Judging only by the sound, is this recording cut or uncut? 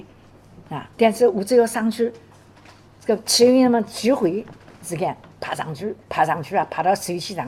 cut